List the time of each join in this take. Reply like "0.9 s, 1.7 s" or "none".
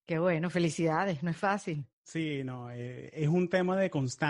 1.9 s